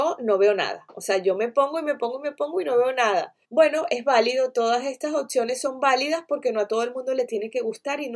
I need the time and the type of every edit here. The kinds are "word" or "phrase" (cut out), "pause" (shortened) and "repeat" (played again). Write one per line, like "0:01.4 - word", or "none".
0:03.4 - pause